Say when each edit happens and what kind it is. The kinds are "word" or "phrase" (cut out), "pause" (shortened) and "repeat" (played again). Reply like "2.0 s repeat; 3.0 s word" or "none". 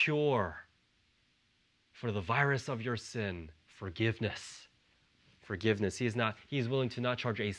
3.6 s pause